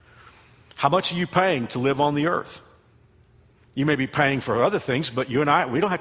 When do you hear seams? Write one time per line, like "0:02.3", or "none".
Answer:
none